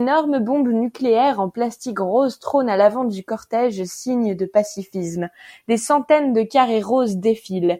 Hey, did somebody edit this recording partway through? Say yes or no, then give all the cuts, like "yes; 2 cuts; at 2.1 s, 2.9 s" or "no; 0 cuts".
no; 0 cuts